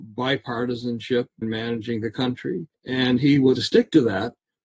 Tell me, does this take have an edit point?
yes; 3 cuts; at 1.4 s, 2.7 s, 3.5 s

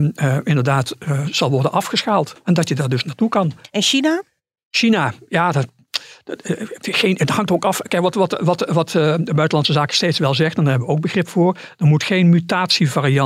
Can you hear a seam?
no; 0 cuts

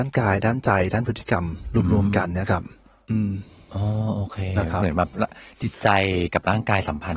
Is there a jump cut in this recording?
no; 0 cuts

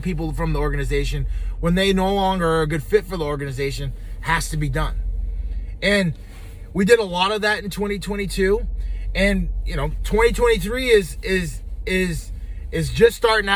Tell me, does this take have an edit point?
no; 0 cuts

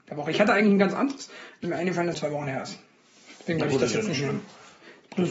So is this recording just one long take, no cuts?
no; 3 cuts; at 1.6 s, 2.1 s, 3.4 s

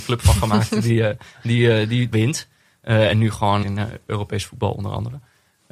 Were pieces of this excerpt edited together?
yes; 2 cuts; at 2.1 s, 3.6 s

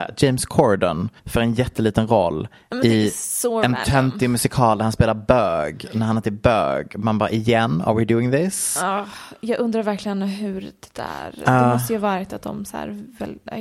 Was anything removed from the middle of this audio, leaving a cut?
yes; 1 cut; at 1.2 s

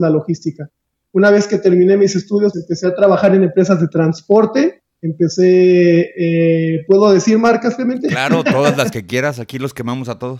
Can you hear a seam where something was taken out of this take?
yes; 1 cut; at 2.5 s

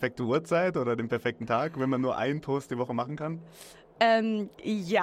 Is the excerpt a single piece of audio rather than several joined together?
yes; 0 cuts

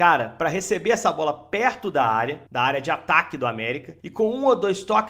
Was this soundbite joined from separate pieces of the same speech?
yes; 2 cuts; at 2.5 s, 4.0 s

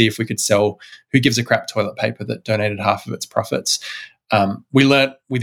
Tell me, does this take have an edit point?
no; 0 cuts

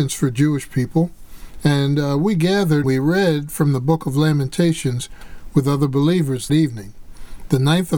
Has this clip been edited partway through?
yes; 2 cuts; at 2.8 s, 6.5 s

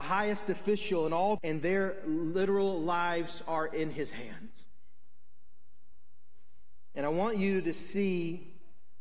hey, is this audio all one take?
no; 1 cut; at 1.4 s

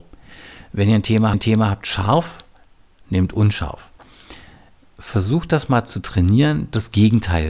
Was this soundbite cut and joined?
yes; 1 cut; at 1.3 s

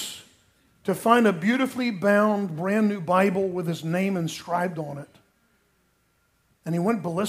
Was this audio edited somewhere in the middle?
no; 0 cuts

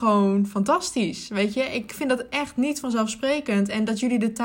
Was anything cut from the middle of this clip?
no; 0 cuts

